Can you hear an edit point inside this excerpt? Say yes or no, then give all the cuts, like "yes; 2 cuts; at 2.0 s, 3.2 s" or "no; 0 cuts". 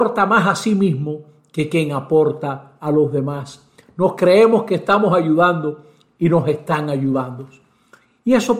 no; 0 cuts